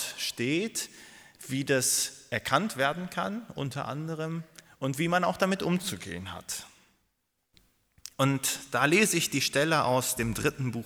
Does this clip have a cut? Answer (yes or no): no